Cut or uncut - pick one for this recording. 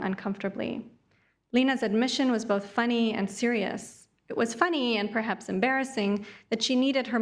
uncut